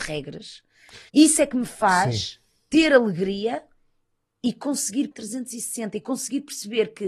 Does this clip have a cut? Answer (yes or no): yes